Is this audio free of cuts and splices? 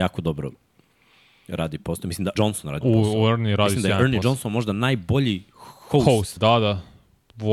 no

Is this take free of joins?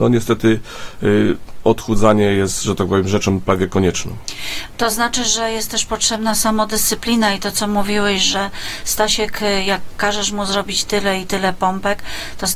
yes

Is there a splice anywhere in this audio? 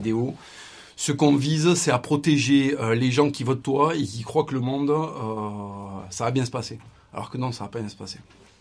yes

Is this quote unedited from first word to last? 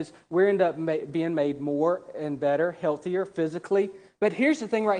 yes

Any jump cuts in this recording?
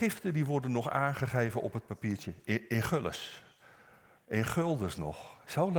no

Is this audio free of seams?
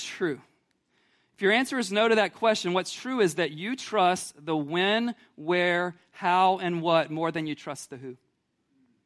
yes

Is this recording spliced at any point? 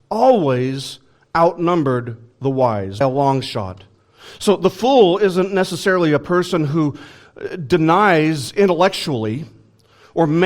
yes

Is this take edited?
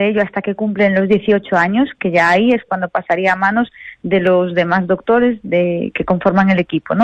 no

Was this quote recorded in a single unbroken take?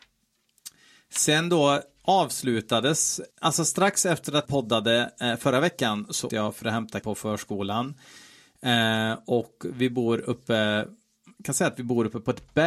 no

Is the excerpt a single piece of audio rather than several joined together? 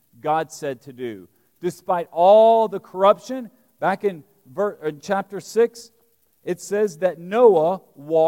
yes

